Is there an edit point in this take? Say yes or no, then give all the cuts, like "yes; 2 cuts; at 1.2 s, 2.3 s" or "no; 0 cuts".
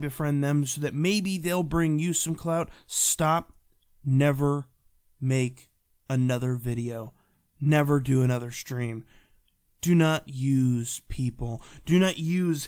no; 0 cuts